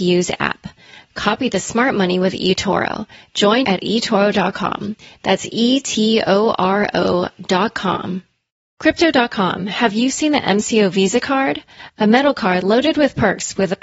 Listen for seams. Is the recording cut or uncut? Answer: cut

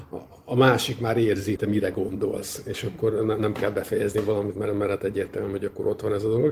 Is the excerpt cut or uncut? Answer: cut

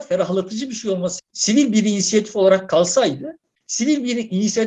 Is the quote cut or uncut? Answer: cut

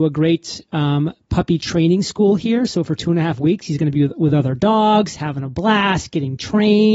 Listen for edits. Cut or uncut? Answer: uncut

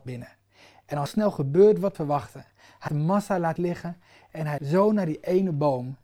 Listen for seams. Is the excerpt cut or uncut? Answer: cut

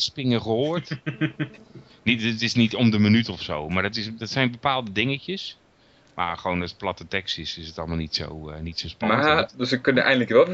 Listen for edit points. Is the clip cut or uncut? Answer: uncut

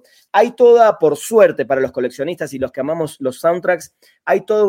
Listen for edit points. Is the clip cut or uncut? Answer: uncut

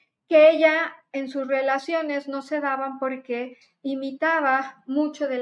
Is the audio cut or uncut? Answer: uncut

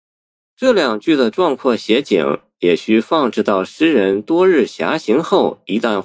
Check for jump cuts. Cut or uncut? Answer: uncut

